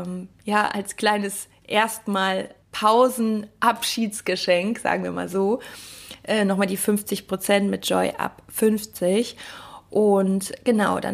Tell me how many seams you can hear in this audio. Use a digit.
1